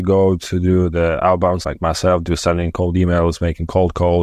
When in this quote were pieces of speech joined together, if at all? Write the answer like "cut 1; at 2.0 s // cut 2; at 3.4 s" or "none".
cut 1; at 1.6 s